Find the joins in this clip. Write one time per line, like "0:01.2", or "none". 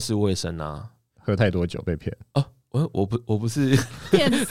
none